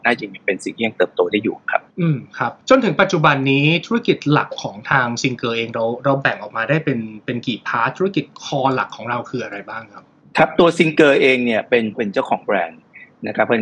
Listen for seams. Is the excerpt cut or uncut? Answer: cut